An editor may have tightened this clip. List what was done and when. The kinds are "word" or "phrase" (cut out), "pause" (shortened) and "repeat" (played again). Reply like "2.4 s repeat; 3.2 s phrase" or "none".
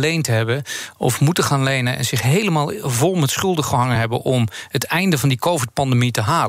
none